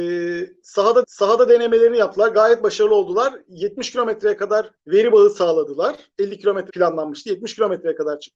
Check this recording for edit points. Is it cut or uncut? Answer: cut